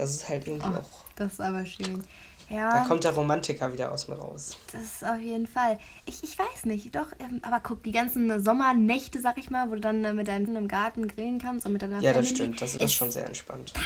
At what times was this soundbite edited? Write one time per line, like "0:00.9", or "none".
0:10.5
0:12.8